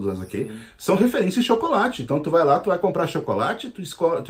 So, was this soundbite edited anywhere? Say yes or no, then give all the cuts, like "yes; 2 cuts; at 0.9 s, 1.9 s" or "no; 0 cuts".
no; 0 cuts